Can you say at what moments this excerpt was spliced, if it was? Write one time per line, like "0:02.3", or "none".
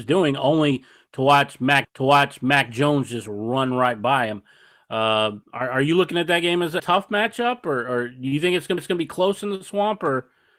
0:01.8
0:05.4
0:06.8
0:08.8